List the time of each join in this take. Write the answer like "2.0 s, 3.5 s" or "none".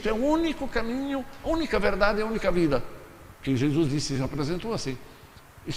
none